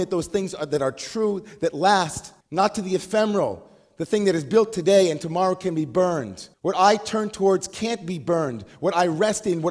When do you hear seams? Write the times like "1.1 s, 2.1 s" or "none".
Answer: 2.4 s, 6.5 s